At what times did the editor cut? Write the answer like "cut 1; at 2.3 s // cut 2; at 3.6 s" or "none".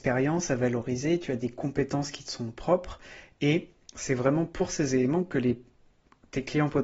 none